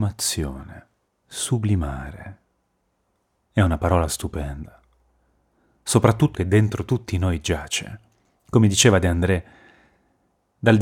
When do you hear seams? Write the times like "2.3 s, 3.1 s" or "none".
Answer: 1.1 s, 6.3 s